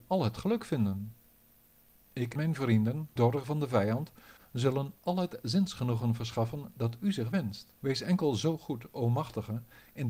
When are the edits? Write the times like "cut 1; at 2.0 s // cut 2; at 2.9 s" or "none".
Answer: cut 1; at 2.4 s // cut 2; at 3.2 s // cut 3; at 7.8 s